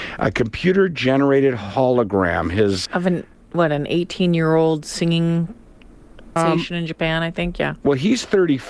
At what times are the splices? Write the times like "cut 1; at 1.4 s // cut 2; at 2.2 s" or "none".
cut 1; at 2.9 s // cut 2; at 6.4 s